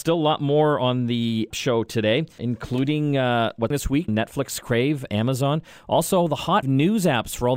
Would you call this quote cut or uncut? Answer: cut